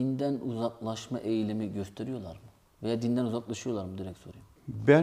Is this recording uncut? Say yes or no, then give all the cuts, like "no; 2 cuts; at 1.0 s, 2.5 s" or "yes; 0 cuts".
yes; 0 cuts